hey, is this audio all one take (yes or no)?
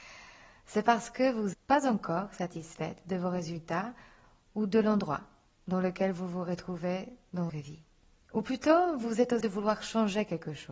no